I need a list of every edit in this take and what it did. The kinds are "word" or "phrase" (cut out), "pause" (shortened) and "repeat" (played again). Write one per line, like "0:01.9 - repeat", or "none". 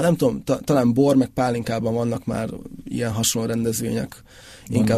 none